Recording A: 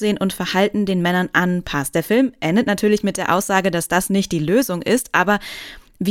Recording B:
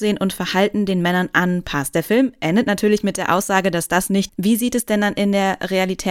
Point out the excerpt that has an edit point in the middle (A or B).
B